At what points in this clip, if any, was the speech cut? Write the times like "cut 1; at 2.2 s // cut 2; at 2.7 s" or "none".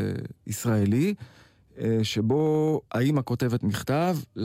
cut 1; at 2.9 s